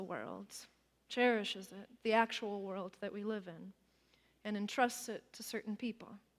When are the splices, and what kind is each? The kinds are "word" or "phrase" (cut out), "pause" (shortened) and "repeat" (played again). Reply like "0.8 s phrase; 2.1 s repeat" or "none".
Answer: none